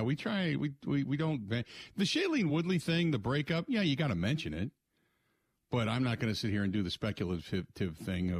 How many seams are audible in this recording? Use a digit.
0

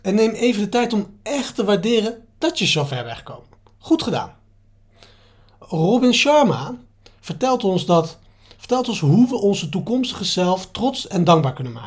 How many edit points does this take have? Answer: 1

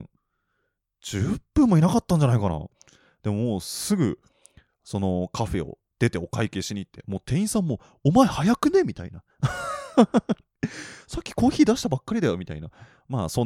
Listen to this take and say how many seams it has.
0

